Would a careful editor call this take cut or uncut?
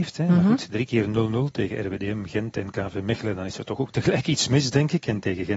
uncut